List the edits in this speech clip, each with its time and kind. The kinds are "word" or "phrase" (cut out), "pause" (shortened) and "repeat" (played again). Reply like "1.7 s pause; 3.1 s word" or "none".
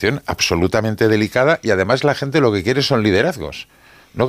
none

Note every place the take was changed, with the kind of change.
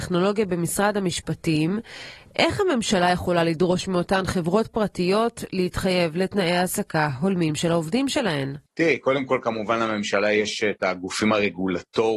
8.7 s pause

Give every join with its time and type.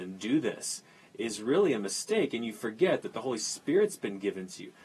none

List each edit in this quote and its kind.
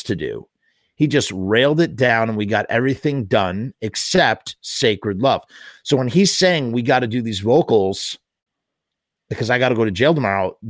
none

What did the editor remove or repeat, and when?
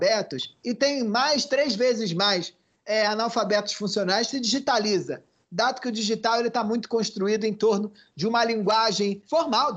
none

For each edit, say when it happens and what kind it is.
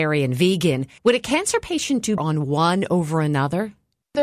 1.0 s pause; 2.2 s word

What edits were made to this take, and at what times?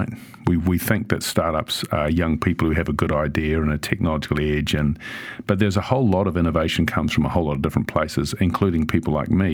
none

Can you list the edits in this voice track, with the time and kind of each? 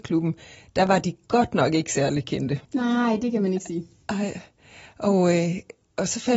2.6 s pause

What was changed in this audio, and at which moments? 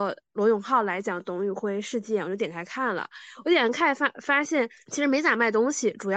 none

